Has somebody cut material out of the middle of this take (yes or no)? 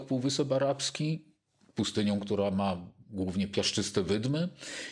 no